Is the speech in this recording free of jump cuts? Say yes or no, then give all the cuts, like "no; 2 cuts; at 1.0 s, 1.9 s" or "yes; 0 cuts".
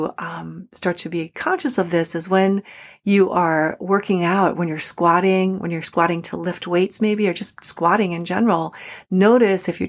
yes; 0 cuts